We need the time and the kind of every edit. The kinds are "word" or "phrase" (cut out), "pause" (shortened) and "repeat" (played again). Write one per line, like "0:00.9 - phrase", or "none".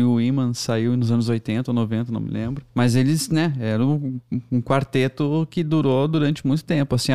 0:02.7 - pause